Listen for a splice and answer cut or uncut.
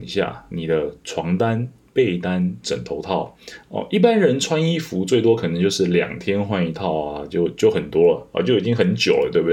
uncut